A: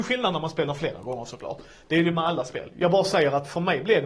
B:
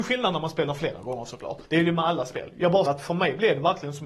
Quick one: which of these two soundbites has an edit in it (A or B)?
B